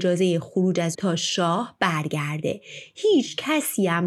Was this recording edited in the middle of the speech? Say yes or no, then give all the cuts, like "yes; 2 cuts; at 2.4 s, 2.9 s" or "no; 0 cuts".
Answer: yes; 1 cut; at 0.9 s